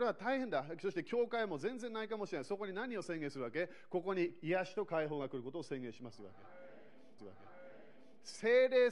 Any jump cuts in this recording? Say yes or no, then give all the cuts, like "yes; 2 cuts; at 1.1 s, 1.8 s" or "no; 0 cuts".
yes; 1 cut; at 7.2 s